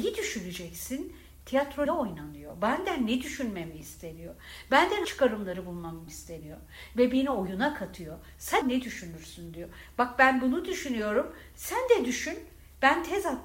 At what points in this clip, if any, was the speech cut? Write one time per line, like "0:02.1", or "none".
0:01.9
0:05.0
0:06.1
0:08.6